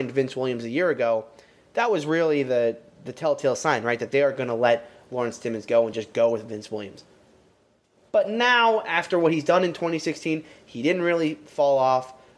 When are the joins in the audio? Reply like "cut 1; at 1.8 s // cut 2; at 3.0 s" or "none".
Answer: none